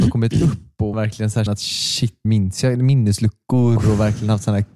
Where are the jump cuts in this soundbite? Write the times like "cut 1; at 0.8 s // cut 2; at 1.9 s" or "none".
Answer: cut 1; at 0.9 s // cut 2; at 1.5 s // cut 3; at 2.2 s